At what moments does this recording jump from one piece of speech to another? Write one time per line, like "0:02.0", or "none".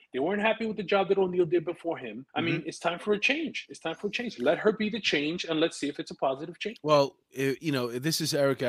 0:02.3

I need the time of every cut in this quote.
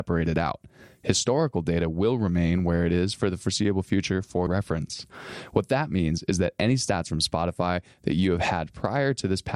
0:04.5

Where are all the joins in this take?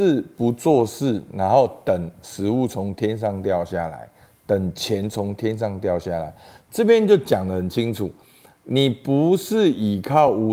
none

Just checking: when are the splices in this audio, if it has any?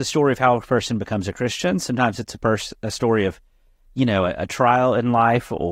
none

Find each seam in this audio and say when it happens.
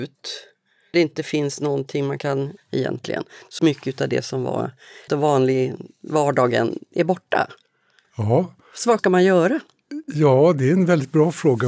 0:00.9
0:02.6
0:03.6
0:05.1
0:09.0

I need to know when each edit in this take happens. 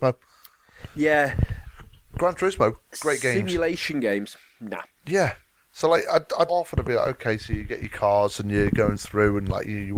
0:06.5

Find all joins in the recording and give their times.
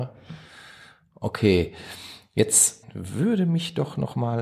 0:02.8

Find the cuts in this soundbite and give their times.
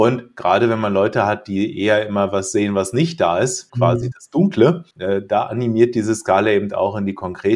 0:03.7
0:04.9

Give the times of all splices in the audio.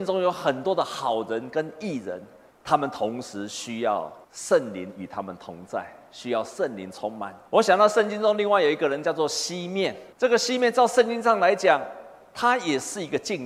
0:02.5
0:04.2
0:07.5
0:10.1

